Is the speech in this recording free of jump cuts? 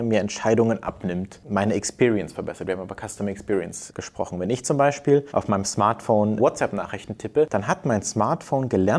yes; 0 cuts

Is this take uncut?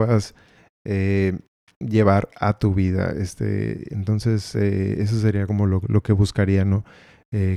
yes; 0 cuts

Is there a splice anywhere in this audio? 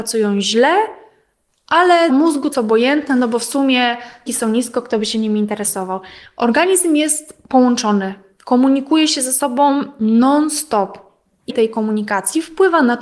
yes; 4 cuts; at 2.1 s, 2.5 s, 4.3 s, 11.5 s

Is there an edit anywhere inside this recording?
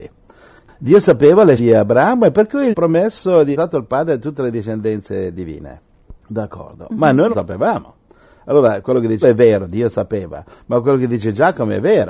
yes; 6 cuts; at 1.6 s, 2.7 s, 3.5 s, 6.2 s, 7.3 s, 9.2 s

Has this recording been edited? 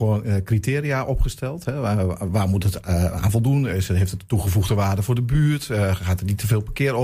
no; 0 cuts

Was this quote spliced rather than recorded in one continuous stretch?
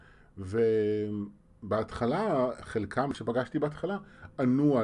no; 0 cuts

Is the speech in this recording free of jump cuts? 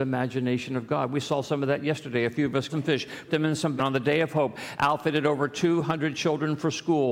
no; 3 cuts; at 2.7 s, 3.3 s, 3.8 s

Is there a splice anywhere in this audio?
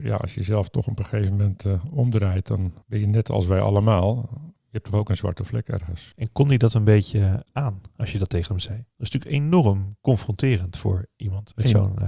no; 0 cuts

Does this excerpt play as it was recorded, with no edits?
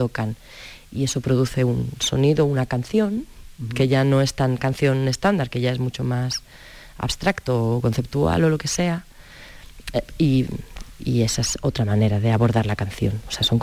yes; 0 cuts

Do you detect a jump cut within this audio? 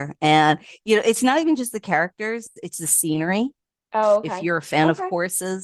yes; 1 cut; at 3.6 s

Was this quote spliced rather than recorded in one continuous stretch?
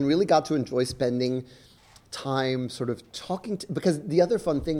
no; 0 cuts

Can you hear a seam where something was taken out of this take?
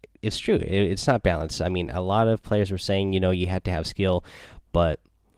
no; 0 cuts

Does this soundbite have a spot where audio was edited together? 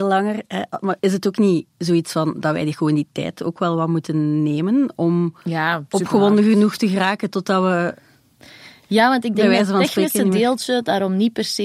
yes; 3 cuts; at 1.0 s, 1.7 s, 5.4 s

